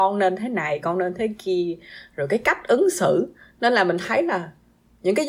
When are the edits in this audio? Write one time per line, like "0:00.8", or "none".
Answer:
none